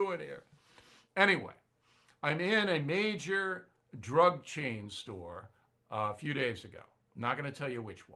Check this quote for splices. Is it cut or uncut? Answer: uncut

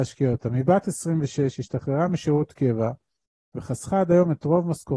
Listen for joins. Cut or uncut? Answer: uncut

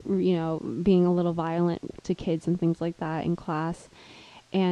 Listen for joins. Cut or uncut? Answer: uncut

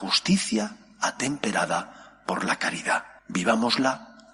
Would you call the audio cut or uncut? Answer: cut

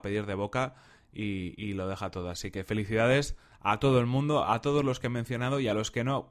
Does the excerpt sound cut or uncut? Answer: uncut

